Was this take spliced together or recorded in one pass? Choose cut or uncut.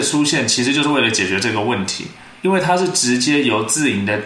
cut